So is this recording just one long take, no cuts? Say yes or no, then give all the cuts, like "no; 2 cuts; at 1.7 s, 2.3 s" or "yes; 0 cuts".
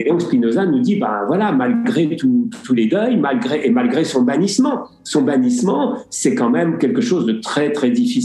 yes; 0 cuts